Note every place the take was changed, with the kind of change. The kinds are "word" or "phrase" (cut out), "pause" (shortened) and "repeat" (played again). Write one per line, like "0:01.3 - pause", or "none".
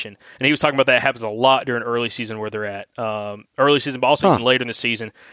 none